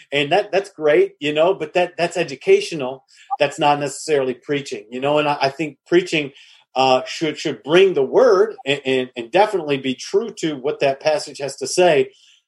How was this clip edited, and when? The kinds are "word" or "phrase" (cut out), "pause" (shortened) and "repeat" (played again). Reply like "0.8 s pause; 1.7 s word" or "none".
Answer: none